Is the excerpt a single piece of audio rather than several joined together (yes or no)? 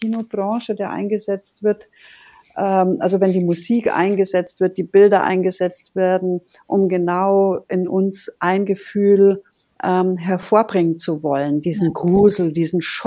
yes